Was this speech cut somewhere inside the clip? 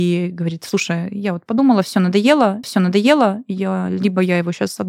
yes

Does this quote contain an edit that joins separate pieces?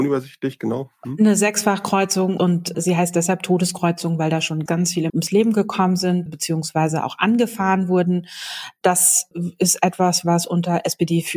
yes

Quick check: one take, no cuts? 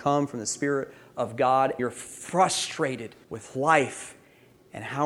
no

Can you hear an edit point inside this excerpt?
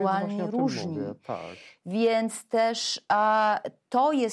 no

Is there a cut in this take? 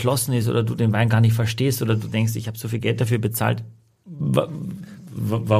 no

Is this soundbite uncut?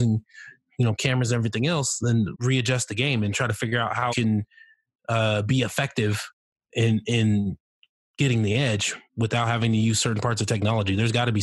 no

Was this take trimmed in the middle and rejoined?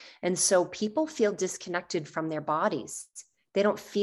no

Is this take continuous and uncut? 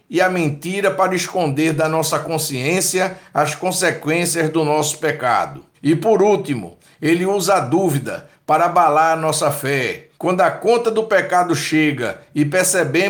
no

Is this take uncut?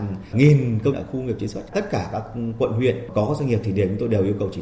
no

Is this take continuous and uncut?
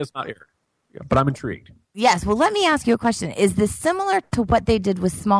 yes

